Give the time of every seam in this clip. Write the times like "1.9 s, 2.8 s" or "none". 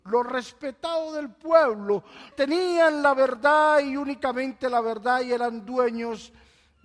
2.3 s

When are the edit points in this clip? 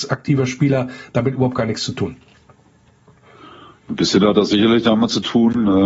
none

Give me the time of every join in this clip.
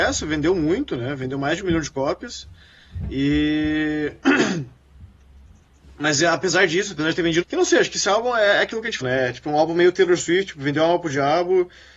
7.4 s, 9.0 s

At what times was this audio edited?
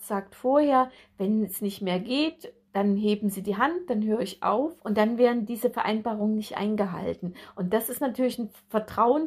4.8 s

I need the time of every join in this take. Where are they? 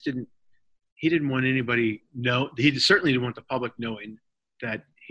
none

